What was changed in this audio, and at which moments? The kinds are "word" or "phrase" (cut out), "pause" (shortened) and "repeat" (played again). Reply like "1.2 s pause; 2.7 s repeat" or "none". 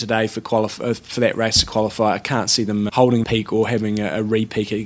2.9 s word; 3.2 s word